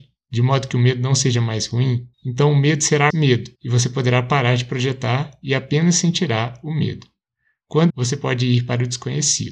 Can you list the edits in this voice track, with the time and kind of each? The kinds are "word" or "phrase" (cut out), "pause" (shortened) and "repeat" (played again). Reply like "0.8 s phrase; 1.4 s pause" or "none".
2.1 s pause; 3.1 s word; 3.6 s pause; 7.9 s phrase